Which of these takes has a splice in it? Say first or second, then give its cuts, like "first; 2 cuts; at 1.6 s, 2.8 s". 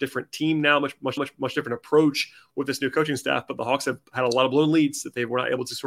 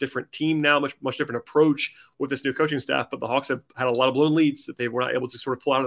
first; 1 cut; at 1.2 s